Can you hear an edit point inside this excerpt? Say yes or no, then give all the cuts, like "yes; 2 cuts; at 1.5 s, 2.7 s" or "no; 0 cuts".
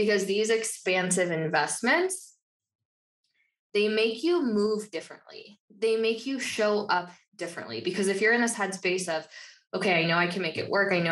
no; 0 cuts